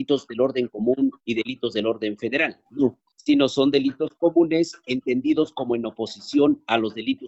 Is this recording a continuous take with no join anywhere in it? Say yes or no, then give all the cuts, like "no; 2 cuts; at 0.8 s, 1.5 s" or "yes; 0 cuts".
yes; 0 cuts